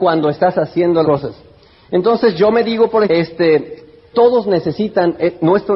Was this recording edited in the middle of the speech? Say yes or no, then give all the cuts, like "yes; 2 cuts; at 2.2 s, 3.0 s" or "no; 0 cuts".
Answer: yes; 3 cuts; at 1.0 s, 3.0 s, 4.1 s